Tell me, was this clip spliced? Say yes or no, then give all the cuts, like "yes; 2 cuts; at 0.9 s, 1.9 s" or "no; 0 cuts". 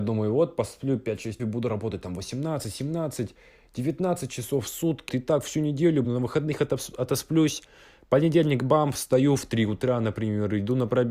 yes; 3 cuts; at 1.4 s, 5.1 s, 6.0 s